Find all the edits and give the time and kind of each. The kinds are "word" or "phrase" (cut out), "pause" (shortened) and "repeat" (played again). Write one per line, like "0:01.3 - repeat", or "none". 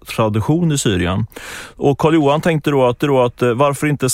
0:03.0 - repeat

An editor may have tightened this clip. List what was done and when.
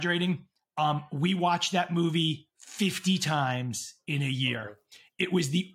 none

